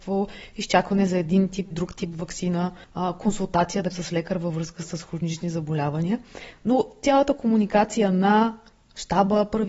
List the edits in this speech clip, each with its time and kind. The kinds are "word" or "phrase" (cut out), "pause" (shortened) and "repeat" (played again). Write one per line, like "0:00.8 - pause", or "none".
0:01.7 - word
0:02.8 - pause
0:03.9 - word